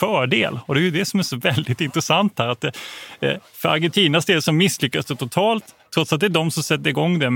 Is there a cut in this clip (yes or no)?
no